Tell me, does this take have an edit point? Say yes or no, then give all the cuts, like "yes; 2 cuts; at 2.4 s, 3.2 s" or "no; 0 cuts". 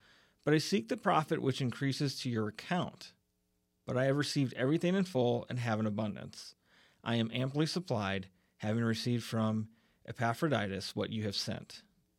no; 0 cuts